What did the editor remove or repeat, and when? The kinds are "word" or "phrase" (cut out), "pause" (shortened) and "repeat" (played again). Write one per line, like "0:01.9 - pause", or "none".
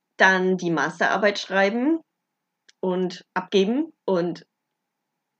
none